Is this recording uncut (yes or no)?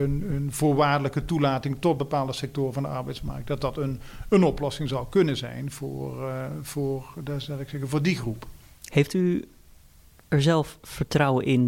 yes